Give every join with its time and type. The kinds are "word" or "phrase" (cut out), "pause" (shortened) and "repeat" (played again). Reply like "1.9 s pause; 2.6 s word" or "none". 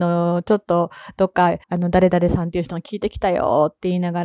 1.6 s pause